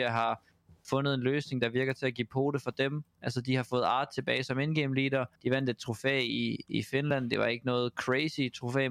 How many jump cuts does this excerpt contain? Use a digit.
1